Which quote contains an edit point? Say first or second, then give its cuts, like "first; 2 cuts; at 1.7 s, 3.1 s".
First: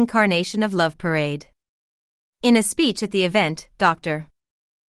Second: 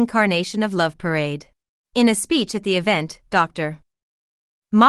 second; 1 cut; at 1.7 s